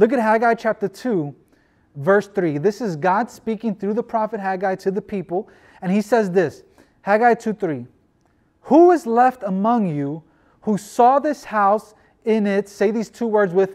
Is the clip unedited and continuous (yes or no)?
yes